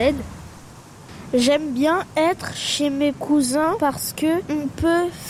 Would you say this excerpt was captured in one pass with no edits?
yes; 0 cuts

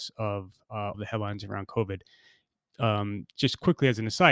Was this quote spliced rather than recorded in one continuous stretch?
yes; 1 cut; at 0.9 s

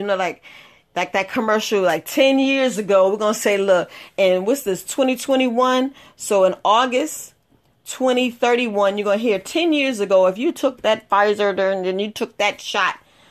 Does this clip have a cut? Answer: no; 0 cuts

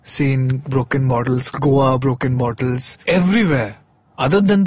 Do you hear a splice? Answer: yes; 1 cut; at 3.0 s

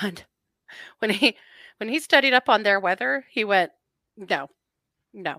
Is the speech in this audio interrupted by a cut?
no; 0 cuts

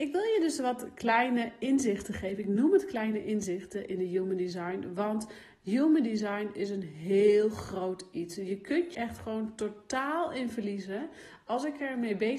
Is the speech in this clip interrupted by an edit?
yes; 1 cut; at 8.9 s

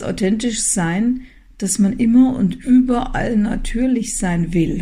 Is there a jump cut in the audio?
no; 0 cuts

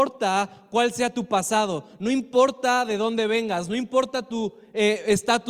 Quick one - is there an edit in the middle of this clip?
no; 0 cuts

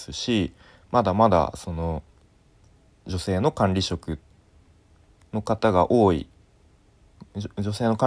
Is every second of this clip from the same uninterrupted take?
yes; 0 cuts

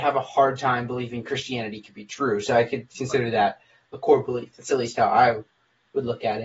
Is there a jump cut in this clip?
no; 0 cuts

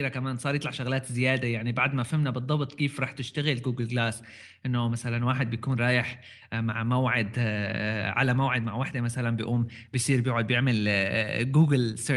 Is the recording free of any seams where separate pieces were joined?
yes; 0 cuts

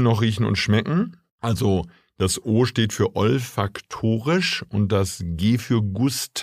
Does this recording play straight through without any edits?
yes; 0 cuts

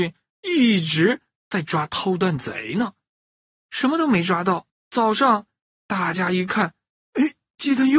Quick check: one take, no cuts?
no; 1 cut; at 4.7 s

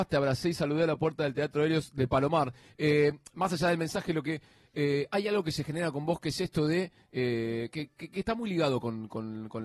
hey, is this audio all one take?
yes; 0 cuts

